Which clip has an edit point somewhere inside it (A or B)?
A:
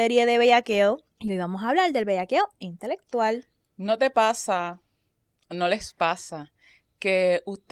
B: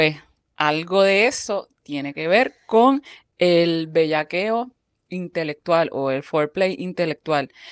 A